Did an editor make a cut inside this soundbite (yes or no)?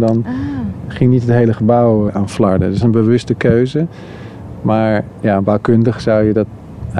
yes